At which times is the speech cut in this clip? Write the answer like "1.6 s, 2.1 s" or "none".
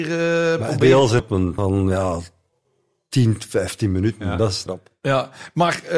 1.2 s, 1.6 s, 4.7 s